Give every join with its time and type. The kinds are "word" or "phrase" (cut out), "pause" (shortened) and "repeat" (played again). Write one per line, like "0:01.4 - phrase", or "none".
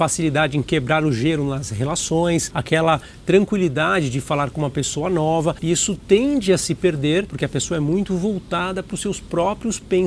none

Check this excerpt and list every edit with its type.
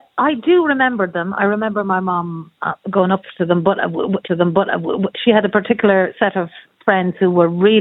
0:04.3 - repeat

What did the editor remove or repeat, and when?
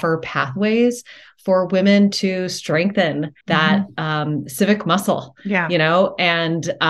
0:03.4 - pause

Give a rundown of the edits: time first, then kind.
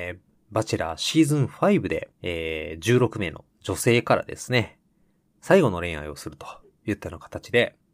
0:02.1 - pause

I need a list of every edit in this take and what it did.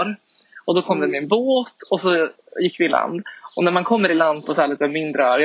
none

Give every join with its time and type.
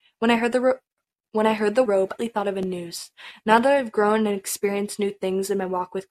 0:01.9 - word
0:02.2 - phrase

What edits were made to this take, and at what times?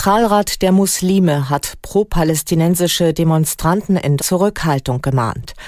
0:04.2 - phrase

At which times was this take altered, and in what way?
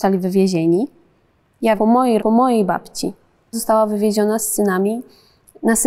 0:01.8 - word
0:02.2 - word
0:03.5 - word

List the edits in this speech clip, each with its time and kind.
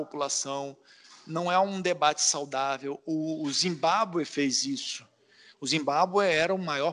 none

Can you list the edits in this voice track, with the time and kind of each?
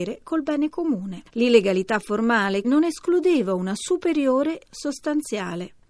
0:02.6 - word
0:04.7 - word

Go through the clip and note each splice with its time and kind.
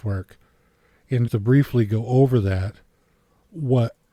0:01.3 - word

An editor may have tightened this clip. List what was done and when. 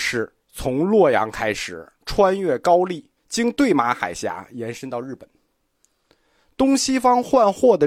0:03.2 - pause

